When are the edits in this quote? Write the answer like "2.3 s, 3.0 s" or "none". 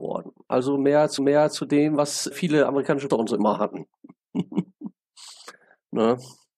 1.2 s, 2.3 s, 3.1 s